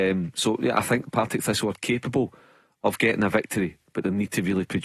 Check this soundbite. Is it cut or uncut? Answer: uncut